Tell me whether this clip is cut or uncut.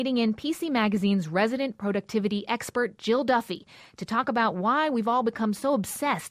uncut